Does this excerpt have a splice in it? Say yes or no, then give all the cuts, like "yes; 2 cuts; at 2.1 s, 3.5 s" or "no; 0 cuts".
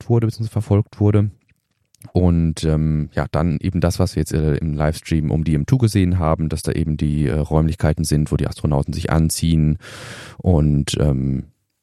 no; 0 cuts